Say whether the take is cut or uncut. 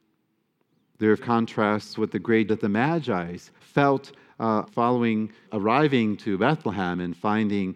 cut